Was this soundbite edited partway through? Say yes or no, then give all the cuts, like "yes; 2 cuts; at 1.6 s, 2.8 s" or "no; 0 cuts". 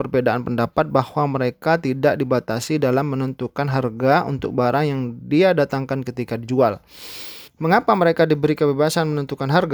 yes; 1 cut; at 7.5 s